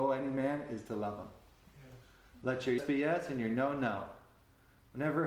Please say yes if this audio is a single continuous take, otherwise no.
no